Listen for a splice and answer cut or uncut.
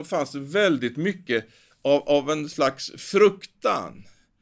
uncut